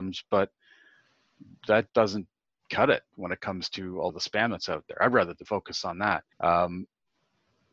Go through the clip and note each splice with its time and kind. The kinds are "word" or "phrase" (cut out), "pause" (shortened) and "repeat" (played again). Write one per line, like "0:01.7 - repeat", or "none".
0:01.9 - word
0:04.1 - word
0:05.4 - word
0:06.3 - pause